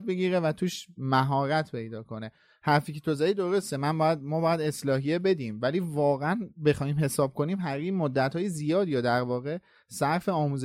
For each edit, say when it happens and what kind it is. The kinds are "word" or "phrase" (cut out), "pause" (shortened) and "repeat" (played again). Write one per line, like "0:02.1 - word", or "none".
none